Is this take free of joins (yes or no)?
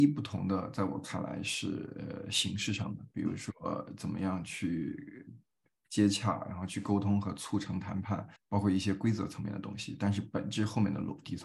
no